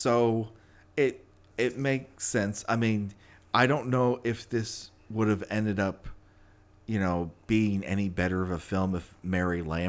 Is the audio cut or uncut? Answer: uncut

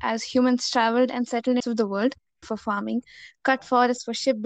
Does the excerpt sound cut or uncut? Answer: cut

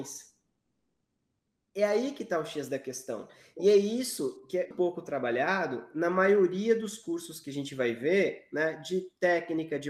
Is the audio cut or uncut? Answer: cut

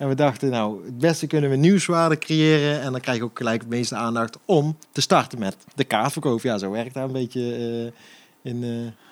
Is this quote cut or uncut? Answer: cut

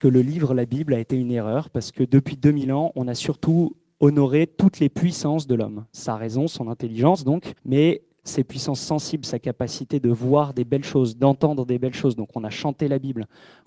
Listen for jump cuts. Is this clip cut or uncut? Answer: cut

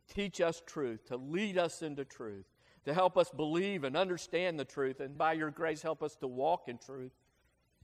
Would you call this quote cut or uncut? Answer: cut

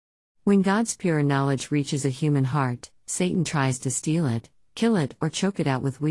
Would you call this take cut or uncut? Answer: uncut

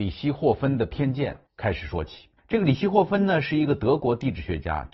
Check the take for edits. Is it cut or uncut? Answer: cut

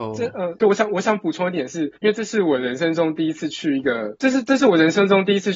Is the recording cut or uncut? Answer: cut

